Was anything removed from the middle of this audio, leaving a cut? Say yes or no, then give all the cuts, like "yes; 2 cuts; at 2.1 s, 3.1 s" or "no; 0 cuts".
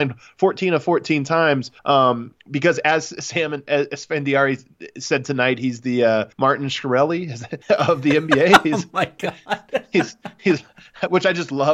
yes; 3 cuts; at 1.8 s, 6.3 s, 7.6 s